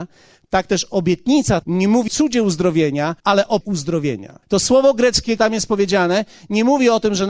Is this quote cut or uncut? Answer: cut